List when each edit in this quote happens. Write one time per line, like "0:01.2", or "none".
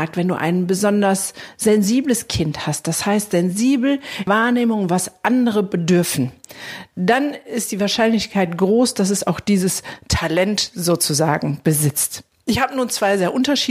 0:04.3

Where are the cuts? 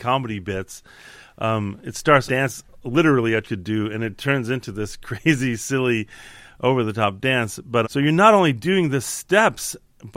0:02.3
0:03.4
0:07.8

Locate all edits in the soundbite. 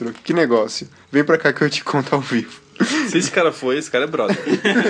none

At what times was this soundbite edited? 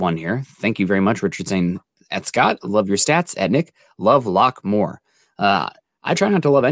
none

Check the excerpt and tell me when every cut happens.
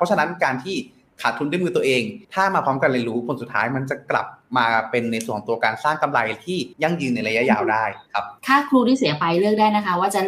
0:02.2
0:06.7
0:08.4

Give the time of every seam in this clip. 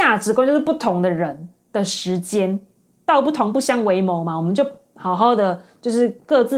none

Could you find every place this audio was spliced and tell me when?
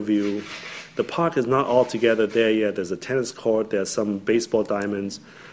none

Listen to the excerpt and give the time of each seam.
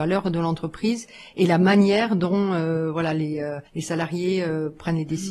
0:03.7

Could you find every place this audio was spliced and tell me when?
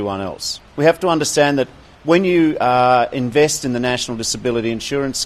none

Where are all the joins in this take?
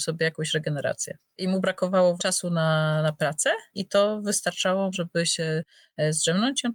0:02.2
0:03.7
0:04.9

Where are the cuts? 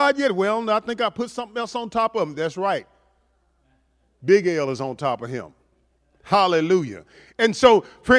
none

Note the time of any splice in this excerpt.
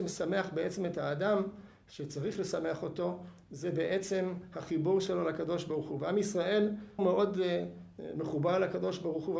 0:07.0

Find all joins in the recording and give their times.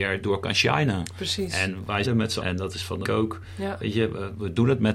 0:02.0
0:02.4
0:03.0

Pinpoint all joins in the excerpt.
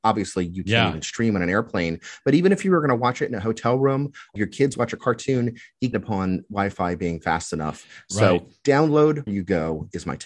0:04.4
0:05.9
0:09.3

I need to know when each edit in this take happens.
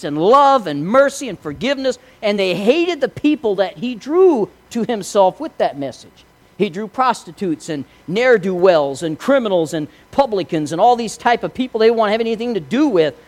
none

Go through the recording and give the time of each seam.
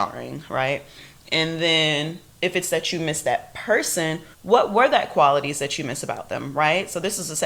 0:04.3

